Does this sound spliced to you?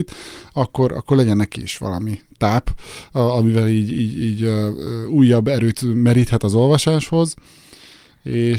no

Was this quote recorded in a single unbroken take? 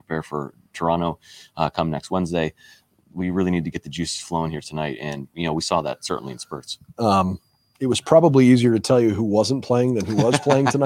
yes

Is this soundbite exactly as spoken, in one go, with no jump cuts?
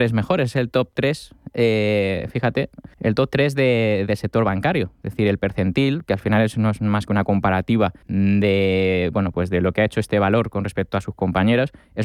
no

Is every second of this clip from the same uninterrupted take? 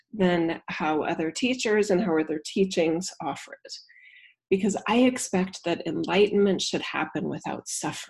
yes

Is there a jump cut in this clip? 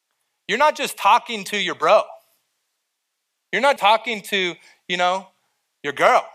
yes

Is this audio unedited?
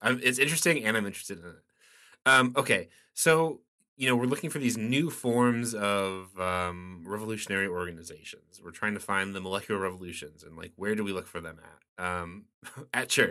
yes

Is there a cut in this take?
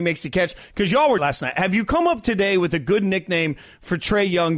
yes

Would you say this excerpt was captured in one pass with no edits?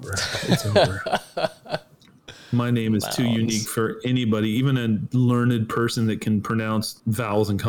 yes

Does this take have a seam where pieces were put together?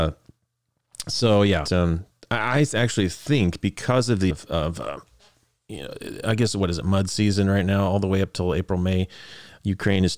yes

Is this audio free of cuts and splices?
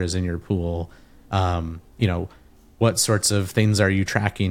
yes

